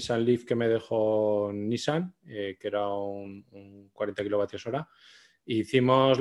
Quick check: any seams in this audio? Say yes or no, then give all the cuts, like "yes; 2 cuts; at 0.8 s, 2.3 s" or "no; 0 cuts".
no; 0 cuts